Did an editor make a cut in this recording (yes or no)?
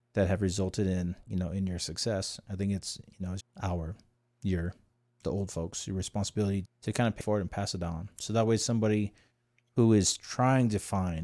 yes